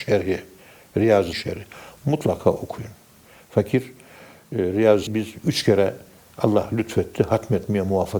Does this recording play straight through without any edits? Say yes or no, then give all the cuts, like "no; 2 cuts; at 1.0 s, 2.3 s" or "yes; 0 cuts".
no; 2 cuts; at 1.3 s, 5.1 s